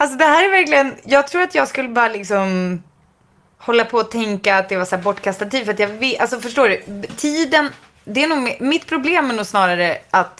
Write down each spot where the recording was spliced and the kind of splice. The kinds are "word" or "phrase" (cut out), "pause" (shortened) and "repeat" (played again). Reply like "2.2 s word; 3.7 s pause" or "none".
none